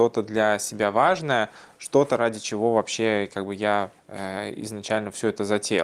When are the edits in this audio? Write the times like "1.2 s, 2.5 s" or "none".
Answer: 4.0 s